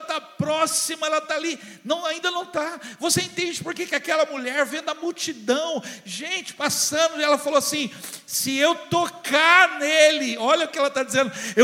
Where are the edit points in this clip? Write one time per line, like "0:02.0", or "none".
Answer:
none